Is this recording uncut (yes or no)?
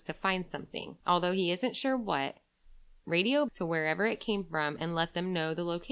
no